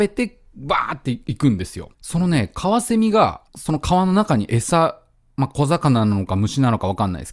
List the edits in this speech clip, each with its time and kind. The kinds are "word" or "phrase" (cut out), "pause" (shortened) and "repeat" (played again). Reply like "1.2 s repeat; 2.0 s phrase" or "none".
1.9 s pause; 3.5 s pause